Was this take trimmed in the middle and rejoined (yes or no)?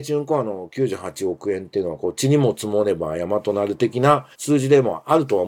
yes